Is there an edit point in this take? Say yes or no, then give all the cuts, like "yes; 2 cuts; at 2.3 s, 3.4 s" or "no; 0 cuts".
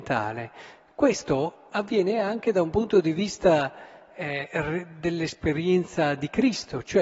no; 0 cuts